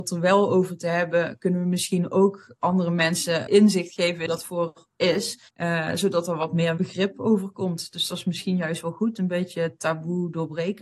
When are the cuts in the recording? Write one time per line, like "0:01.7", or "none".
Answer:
0:03.5
0:04.3
0:04.9
0:05.5
0:06.8